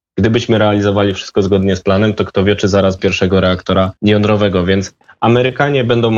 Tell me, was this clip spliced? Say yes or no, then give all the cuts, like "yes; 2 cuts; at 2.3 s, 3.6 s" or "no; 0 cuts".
yes; 2 cuts; at 3.0 s, 4.0 s